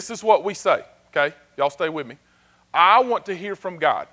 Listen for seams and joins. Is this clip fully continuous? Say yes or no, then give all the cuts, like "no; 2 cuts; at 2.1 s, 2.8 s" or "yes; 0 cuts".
yes; 0 cuts